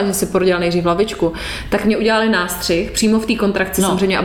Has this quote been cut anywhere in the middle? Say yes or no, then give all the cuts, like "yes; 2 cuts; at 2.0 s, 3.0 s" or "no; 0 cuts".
no; 0 cuts